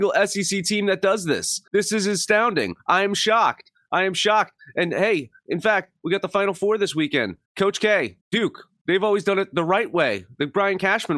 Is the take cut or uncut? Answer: cut